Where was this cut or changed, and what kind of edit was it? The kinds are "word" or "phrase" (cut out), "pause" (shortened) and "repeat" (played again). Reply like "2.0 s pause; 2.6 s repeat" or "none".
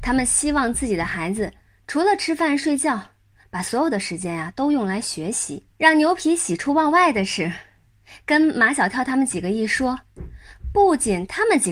5.7 s pause